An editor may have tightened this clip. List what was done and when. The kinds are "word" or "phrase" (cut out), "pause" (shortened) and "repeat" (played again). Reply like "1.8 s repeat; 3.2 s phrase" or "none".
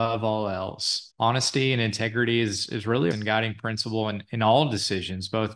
1.1 s pause; 3.1 s phrase